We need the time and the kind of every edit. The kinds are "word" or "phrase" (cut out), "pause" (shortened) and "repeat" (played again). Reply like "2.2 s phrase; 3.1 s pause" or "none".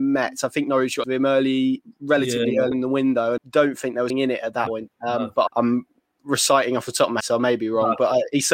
1.0 s word; 2.7 s word; 3.4 s word; 4.1 s word; 4.7 s word; 5.5 s word; 7.2 s word